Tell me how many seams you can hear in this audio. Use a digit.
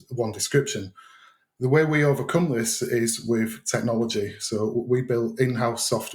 0